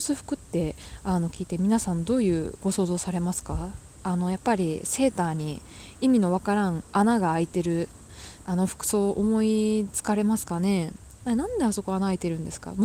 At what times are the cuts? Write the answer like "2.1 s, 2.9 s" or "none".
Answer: 8.4 s